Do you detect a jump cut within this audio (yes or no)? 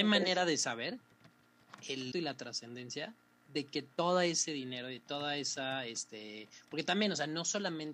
yes